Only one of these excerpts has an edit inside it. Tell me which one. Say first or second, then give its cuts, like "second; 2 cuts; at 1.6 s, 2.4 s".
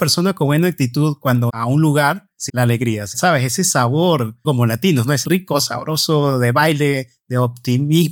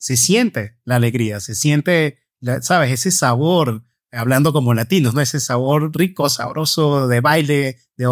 first; 5 cuts; at 1.5 s, 2.5 s, 3.1 s, 4.4 s, 5.2 s